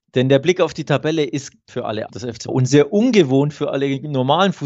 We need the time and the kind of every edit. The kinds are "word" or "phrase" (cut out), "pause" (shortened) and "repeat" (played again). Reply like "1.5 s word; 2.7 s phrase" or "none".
1.7 s word; 2.1 s word; 2.5 s word

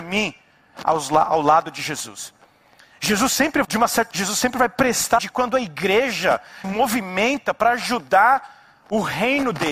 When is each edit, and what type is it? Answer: 3.6 s word; 4.1 s word; 5.2 s word; 6.6 s word

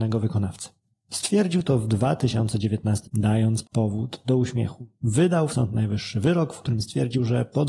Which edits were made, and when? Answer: 3.0 s word; 3.6 s word; 5.5 s word

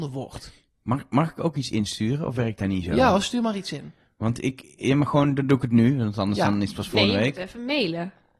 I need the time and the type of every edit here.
none

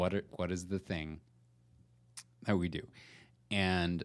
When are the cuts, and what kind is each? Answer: none

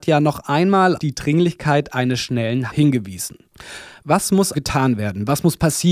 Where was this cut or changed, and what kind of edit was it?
1.0 s word; 2.7 s word; 4.5 s word

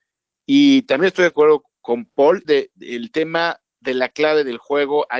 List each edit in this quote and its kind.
1.3 s phrase; 2.4 s phrase

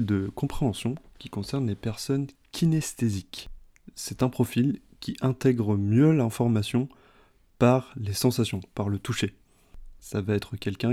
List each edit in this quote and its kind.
none

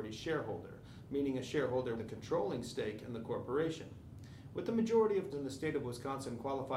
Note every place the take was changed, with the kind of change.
2.0 s word; 5.3 s word

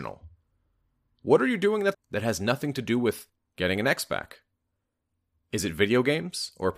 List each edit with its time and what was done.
1.9 s word

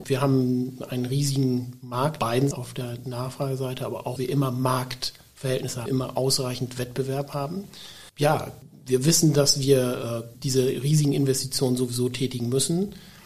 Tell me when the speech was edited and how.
2.2 s phrase; 2.5 s word; 4.2 s phrase; 5.9 s word; 8.1 s pause

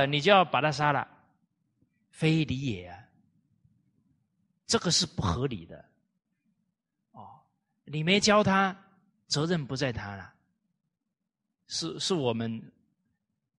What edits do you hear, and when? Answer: none

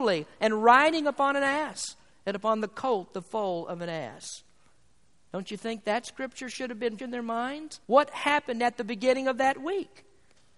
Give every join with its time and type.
7.0 s word; 7.8 s pause

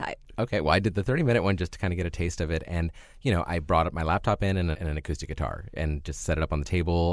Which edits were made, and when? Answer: 4.7 s word

